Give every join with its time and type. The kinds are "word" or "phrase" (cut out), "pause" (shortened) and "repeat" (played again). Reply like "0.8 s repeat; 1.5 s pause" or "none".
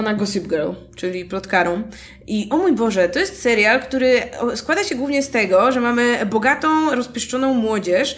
none